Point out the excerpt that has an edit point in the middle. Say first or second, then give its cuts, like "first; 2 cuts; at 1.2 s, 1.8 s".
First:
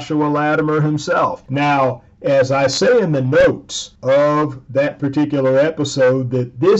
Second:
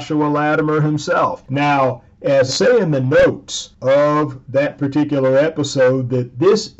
second; 1 cut; at 2.5 s